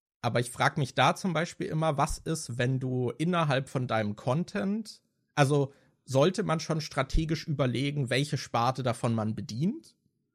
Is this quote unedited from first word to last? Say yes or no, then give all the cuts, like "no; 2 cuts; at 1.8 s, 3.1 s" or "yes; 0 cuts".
yes; 0 cuts